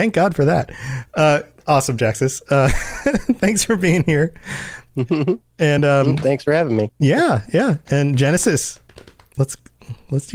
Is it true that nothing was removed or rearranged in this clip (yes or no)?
yes